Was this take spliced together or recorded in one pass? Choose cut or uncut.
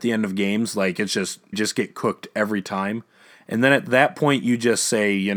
cut